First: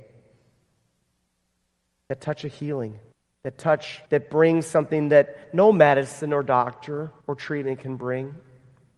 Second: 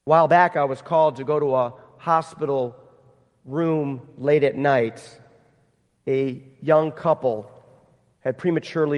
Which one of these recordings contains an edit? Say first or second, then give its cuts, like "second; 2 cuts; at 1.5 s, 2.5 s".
first; 3 cuts; at 3.1 s, 4.1 s, 7.2 s